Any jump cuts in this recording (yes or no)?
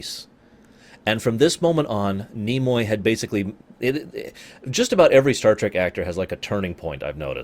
no